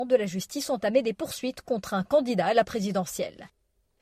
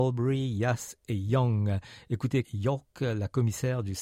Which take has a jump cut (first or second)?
second